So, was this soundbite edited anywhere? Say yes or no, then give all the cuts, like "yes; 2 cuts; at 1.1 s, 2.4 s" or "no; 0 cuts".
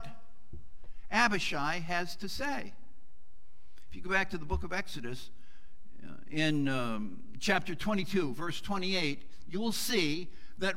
no; 0 cuts